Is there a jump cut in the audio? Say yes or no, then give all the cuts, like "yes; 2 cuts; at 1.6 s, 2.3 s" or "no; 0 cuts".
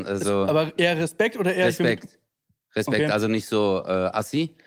no; 0 cuts